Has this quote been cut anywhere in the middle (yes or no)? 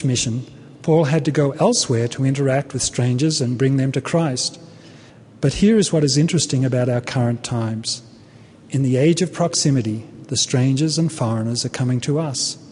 no